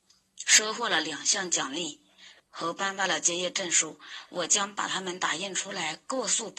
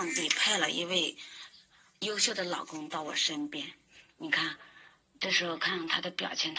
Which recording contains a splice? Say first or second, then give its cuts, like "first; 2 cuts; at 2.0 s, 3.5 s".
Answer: first; 1 cut; at 2.4 s